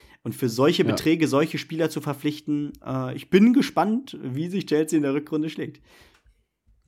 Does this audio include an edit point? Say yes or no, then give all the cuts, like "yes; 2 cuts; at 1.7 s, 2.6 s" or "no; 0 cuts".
no; 0 cuts